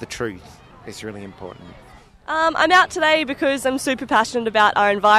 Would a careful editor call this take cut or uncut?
uncut